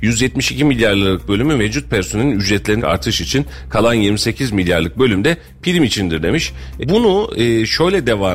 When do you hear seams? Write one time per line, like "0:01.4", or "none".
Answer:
0:02.8
0:06.8